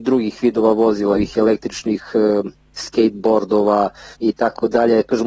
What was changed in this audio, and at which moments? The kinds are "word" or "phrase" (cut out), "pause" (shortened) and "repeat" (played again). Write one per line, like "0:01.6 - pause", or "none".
0:01.1 - word
0:04.1 - pause